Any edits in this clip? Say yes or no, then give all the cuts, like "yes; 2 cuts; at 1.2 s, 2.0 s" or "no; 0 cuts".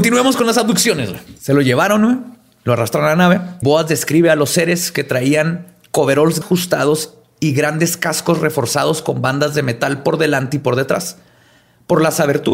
yes; 3 cuts; at 1.4 s, 3.6 s, 6.4 s